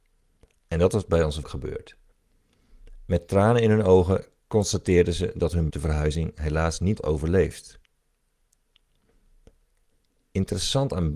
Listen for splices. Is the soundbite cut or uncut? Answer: cut